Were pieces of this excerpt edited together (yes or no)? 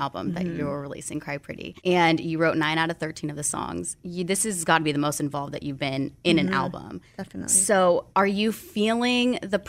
yes